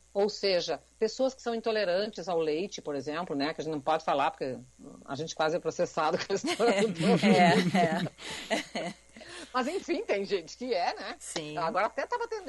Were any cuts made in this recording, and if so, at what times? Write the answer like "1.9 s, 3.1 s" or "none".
none